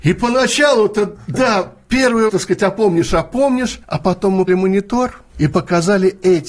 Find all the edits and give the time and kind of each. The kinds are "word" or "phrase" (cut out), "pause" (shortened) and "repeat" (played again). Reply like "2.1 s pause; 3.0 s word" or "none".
2.3 s word; 3.8 s pause; 4.5 s word; 5.3 s pause